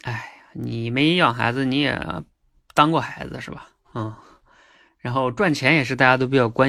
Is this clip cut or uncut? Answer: uncut